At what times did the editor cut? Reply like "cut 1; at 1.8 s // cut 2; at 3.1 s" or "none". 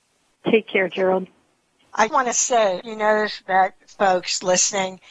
cut 1; at 2.1 s // cut 2; at 2.8 s